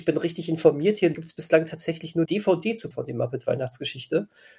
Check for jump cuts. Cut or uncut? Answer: cut